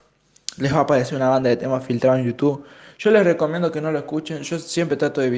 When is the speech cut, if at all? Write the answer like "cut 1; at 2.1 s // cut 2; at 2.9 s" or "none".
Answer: none

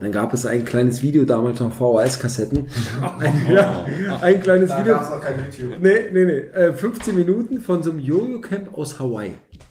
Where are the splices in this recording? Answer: none

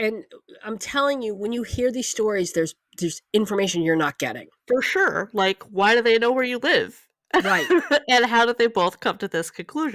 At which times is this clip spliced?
none

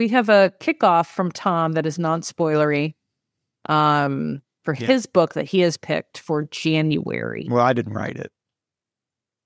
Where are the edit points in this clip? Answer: none

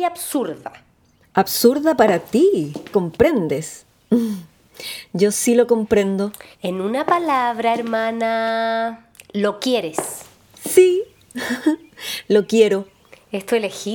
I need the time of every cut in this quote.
cut 1; at 2.9 s // cut 2; at 6.5 s

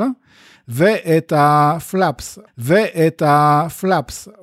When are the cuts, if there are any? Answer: cut 1; at 2.5 s

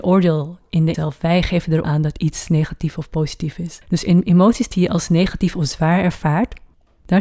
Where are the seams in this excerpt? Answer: cut 1; at 0.9 s // cut 2; at 1.8 s // cut 3; at 3.8 s

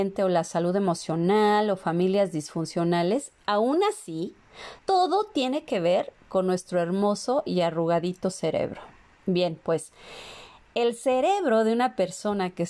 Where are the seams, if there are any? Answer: cut 1; at 4.8 s

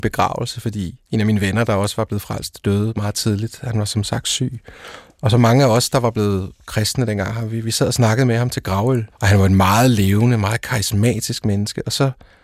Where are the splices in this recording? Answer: cut 1; at 1.1 s // cut 2; at 9.1 s

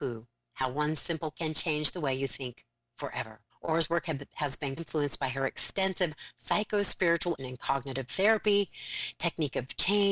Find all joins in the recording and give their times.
cut 1; at 1.3 s // cut 2; at 3.5 s // cut 3; at 4.8 s // cut 4; at 7.4 s // cut 5; at 8.1 s

